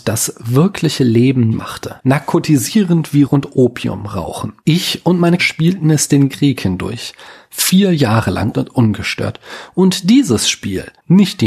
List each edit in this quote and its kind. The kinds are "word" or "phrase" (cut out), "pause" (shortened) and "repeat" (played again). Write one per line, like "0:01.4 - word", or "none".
0:01.5 - word
0:03.2 - word
0:05.4 - word
0:06.3 - word
0:08.5 - word